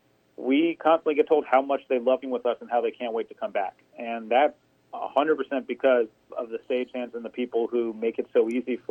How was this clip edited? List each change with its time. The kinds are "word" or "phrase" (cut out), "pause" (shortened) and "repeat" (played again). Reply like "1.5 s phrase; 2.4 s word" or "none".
2.2 s word; 4.6 s pause; 6.3 s word